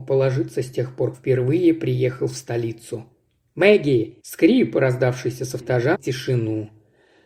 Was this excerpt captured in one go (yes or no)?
no